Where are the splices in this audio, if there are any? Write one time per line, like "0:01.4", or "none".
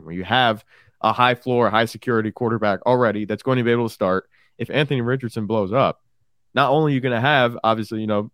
none